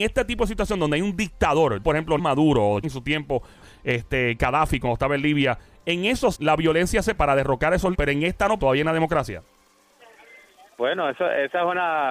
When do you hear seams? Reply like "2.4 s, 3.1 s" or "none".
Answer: 1.8 s, 2.2 s, 2.8 s, 3.6 s, 6.3 s, 7.2 s, 7.9 s, 8.6 s

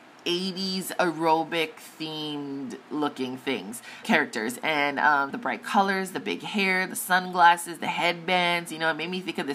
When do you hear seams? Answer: 4.0 s, 5.3 s

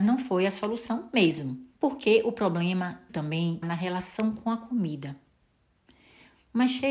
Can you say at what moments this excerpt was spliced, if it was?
1.7 s, 3.1 s, 3.6 s

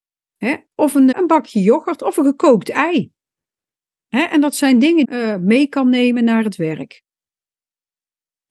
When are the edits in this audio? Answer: 1.1 s, 5.0 s

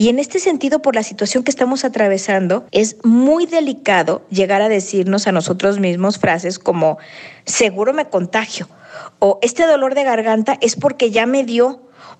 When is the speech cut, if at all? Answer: 2.7 s

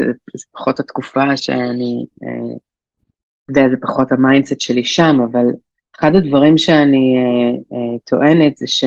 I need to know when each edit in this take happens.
none

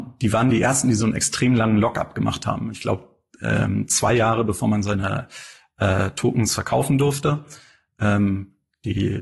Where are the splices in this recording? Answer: none

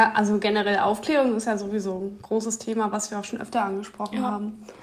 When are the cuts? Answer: none

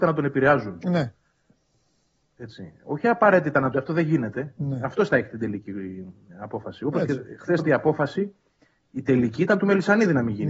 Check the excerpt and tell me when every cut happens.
3.7 s, 7.6 s

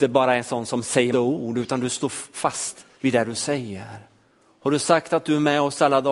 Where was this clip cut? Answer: 1.1 s, 2.9 s

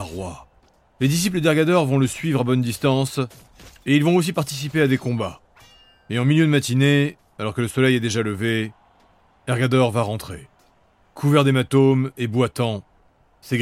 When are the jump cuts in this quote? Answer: none

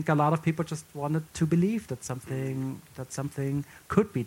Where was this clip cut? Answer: 1.3 s

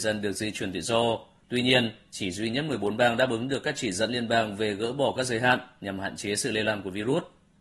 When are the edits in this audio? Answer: none

